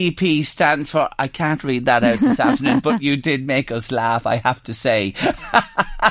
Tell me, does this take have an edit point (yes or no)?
no